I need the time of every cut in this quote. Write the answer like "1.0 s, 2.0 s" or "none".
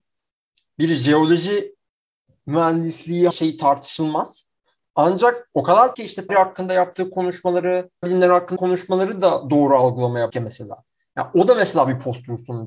3.3 s, 5.9 s, 6.3 s, 8.0 s, 8.6 s, 10.3 s